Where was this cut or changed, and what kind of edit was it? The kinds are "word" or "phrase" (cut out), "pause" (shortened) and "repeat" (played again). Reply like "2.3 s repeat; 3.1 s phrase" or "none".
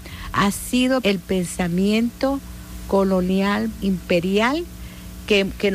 1.0 s word; 3.8 s word